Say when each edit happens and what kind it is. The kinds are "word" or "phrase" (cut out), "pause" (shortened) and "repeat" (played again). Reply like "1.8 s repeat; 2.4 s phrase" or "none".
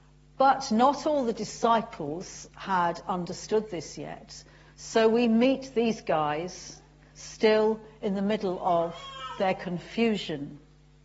none